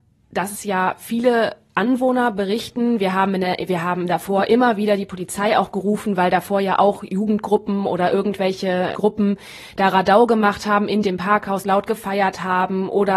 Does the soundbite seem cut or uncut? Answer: cut